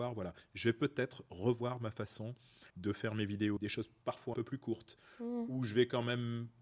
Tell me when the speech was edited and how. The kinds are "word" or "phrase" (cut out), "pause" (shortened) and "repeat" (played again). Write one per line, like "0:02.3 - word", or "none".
0:02.7 - pause
0:03.6 - word
0:04.3 - word

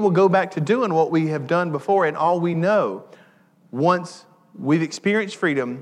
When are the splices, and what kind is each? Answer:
none

